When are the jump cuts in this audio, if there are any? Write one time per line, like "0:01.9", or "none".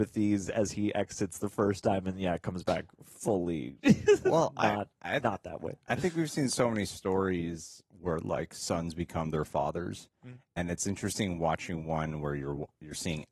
0:04.9